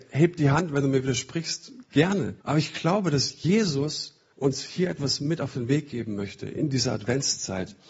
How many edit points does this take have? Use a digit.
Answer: 2